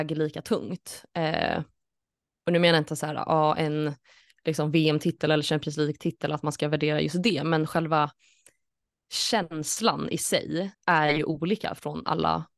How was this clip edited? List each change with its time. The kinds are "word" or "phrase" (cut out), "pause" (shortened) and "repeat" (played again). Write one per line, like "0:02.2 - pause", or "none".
0:10.7 - pause